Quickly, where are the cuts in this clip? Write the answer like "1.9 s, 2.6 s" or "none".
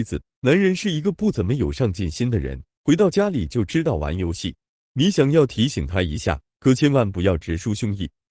none